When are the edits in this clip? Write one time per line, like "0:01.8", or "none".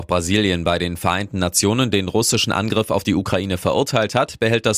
none